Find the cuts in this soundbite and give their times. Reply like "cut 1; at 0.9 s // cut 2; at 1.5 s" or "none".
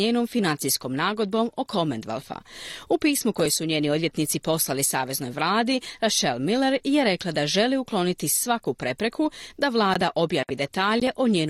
none